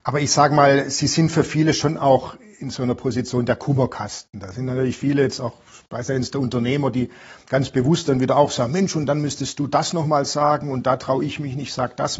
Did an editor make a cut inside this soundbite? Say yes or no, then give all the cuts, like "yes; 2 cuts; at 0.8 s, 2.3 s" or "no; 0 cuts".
no; 0 cuts